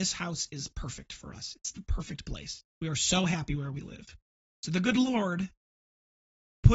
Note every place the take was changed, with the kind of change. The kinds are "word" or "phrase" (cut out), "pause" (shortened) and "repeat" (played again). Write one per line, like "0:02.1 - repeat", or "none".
0:02.7 - pause
0:04.3 - pause